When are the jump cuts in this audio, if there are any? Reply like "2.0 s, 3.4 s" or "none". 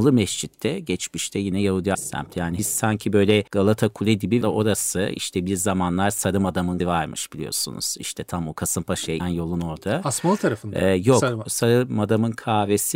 1.9 s, 2.6 s, 3.5 s, 4.4 s, 6.8 s, 9.2 s